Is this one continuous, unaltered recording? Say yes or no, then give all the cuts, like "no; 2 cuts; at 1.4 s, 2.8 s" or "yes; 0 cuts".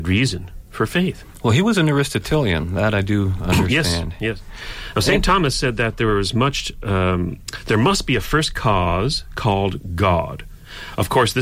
yes; 0 cuts